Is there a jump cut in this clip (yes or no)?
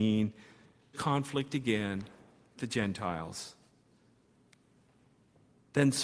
yes